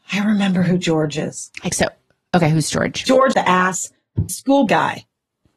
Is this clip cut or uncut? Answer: cut